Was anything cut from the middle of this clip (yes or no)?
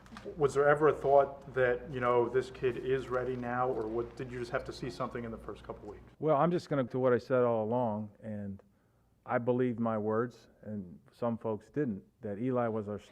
yes